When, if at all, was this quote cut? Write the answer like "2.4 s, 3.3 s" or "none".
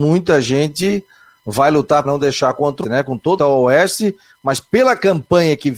2.0 s, 2.8 s, 3.4 s

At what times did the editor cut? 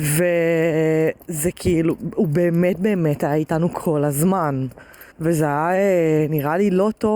5.1 s

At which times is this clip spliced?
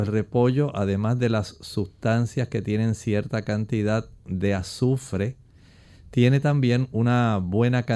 none

